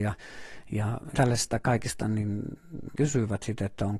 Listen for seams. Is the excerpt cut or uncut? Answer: cut